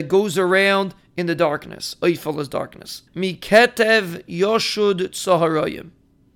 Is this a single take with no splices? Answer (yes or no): no